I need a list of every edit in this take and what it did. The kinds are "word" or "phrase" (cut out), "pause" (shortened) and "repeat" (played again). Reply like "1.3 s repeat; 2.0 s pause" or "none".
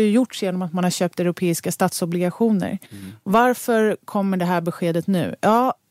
2.9 s pause